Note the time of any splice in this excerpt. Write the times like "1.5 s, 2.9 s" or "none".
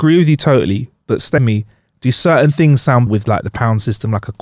1.4 s, 3.1 s